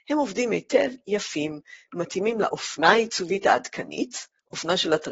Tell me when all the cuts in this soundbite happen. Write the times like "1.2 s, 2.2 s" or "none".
none